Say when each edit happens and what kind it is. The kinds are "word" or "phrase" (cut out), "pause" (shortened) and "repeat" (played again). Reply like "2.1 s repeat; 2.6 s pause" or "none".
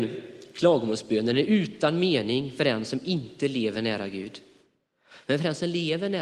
none